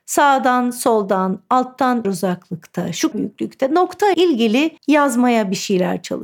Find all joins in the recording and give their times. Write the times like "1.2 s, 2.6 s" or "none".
2.0 s, 3.1 s, 4.1 s, 4.8 s